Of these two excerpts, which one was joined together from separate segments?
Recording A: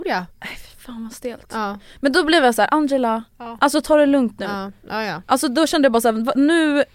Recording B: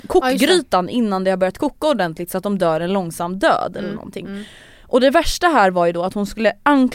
A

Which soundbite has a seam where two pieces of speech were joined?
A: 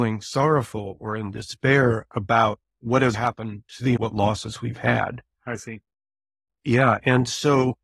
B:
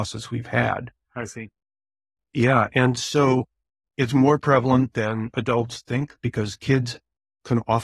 A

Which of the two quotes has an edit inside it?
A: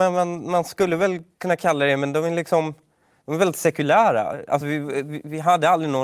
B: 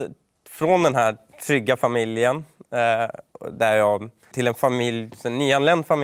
B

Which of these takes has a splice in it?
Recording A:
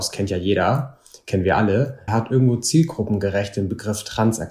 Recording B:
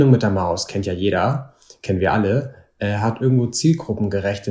A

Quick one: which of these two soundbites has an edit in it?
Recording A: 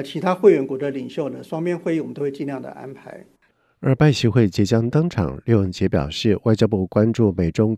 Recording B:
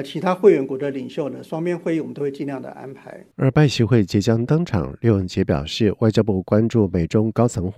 B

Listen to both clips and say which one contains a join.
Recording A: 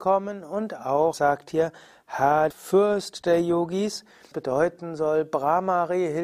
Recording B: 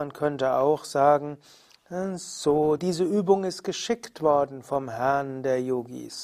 A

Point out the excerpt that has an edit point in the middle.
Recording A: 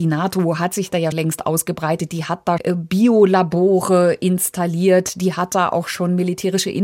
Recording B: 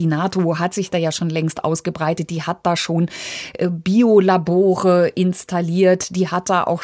A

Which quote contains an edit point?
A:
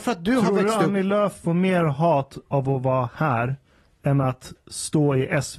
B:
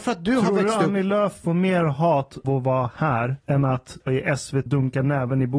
B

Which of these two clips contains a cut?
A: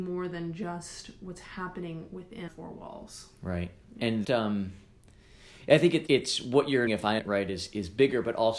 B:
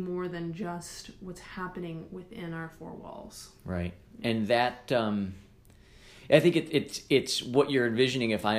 A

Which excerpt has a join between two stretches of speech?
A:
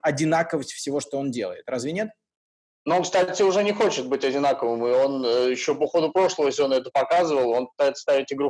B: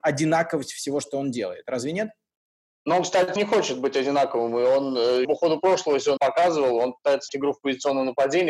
B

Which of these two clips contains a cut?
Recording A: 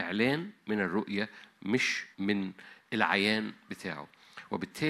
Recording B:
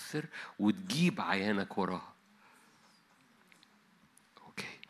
A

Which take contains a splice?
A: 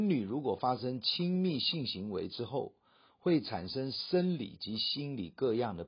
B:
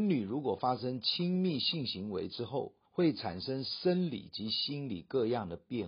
B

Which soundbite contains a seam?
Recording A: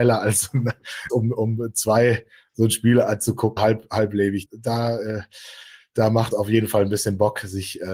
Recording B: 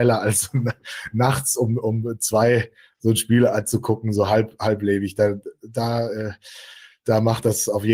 A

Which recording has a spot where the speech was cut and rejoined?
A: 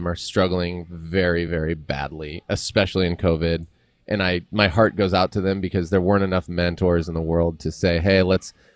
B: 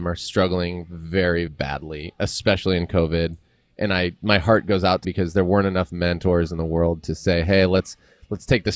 B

